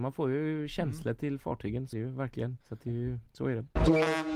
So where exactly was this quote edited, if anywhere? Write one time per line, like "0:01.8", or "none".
0:01.9
0:02.6
0:03.3